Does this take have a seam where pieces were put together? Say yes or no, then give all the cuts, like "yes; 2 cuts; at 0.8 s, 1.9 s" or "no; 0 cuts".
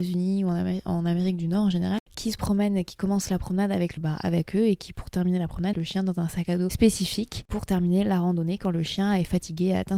yes; 2 cuts; at 4.0 s, 5.7 s